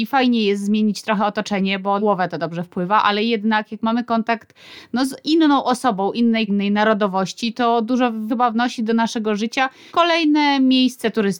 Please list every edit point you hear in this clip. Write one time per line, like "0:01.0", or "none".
0:02.0
0:06.5
0:08.3
0:09.9